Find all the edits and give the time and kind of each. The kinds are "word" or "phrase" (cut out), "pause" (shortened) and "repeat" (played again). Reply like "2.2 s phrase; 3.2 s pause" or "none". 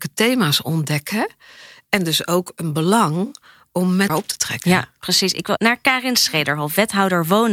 4.1 s word; 5.6 s word